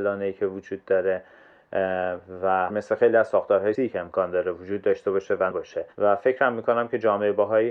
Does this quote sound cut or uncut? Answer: cut